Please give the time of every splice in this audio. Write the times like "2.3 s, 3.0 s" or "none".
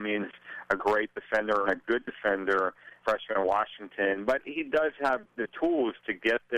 1.7 s, 3.0 s

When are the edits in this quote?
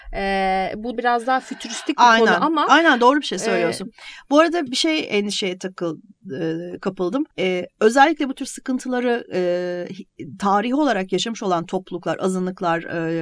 1.0 s, 4.7 s, 7.3 s

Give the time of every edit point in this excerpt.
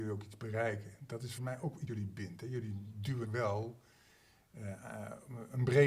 1.4 s, 1.9 s, 3.2 s

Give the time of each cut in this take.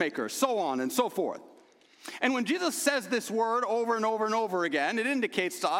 none

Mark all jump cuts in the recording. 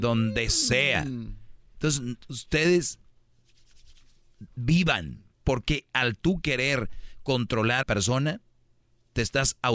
5.3 s, 7.8 s

